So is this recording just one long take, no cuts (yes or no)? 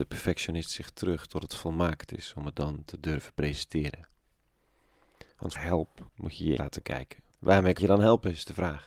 no